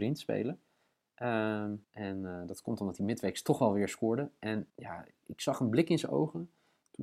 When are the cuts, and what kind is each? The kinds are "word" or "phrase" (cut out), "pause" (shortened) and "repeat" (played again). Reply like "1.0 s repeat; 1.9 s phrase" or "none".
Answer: 1.8 s pause; 4.7 s pause